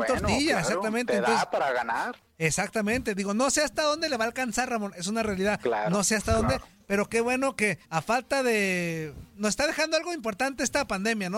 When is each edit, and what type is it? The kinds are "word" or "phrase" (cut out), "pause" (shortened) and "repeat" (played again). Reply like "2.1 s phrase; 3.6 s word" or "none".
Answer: 7.8 s pause

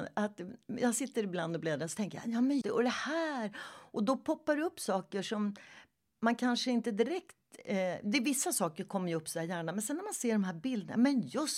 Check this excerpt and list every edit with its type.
2.6 s word

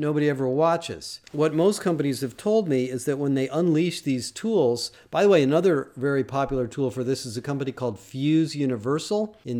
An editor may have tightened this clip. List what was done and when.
none

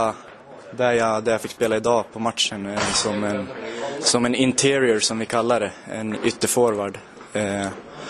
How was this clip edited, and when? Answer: 6.2 s word

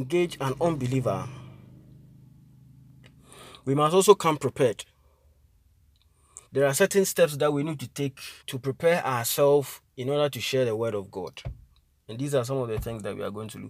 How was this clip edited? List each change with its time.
6.5 s pause; 8.4 s pause

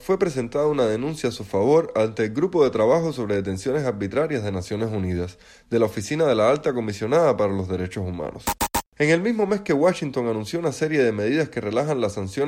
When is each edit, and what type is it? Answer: none

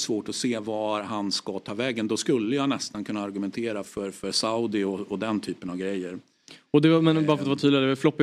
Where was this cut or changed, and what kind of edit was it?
3.8 s word

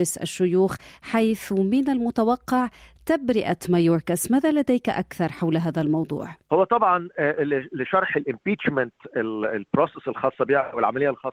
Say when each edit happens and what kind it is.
none

